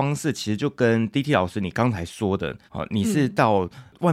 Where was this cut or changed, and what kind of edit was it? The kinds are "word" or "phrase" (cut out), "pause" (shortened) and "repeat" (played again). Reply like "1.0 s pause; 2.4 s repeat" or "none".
2.7 s pause